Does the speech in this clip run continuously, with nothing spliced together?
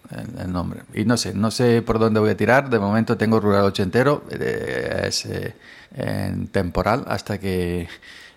no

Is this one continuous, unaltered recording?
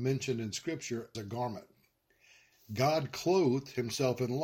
no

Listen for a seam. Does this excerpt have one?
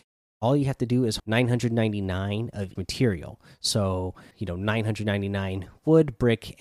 yes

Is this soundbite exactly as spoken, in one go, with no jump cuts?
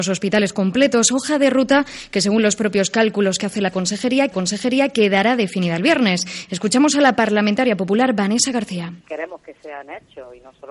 no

